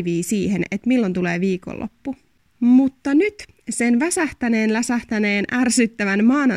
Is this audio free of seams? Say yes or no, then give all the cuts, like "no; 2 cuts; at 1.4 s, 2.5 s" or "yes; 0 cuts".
yes; 0 cuts